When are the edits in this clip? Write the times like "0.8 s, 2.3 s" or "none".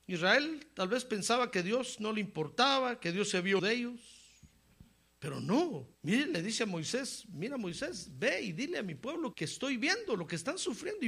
3.6 s, 5.9 s, 9.3 s